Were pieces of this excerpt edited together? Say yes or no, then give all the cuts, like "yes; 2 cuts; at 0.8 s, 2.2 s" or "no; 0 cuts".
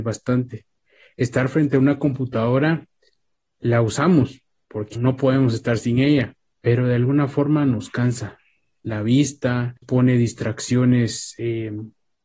yes; 2 cuts; at 4.9 s, 9.8 s